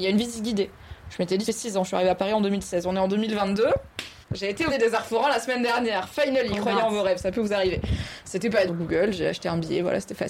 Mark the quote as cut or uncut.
cut